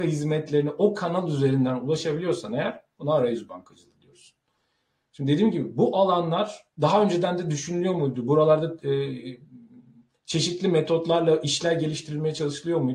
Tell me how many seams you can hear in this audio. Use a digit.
0